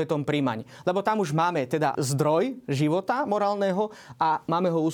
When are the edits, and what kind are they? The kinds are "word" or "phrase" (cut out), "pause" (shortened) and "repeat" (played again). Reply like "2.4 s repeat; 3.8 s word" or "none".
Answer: 1.9 s word